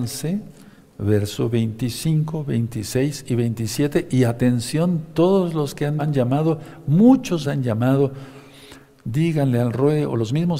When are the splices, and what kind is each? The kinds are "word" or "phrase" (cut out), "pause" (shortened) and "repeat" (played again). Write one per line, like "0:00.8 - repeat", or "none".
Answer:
0:06.0 - word
0:07.4 - word